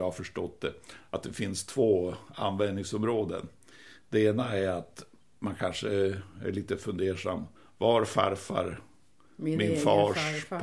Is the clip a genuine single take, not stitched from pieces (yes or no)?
yes